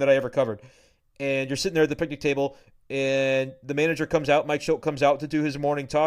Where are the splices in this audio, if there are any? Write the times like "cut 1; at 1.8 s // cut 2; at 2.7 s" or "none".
none